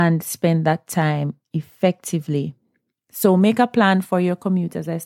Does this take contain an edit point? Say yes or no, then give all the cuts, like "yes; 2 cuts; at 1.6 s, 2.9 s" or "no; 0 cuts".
no; 0 cuts